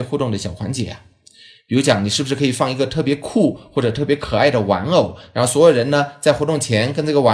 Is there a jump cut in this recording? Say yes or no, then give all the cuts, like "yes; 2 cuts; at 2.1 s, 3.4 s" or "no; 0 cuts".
no; 0 cuts